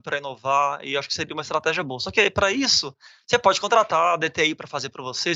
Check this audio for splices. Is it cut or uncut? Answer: uncut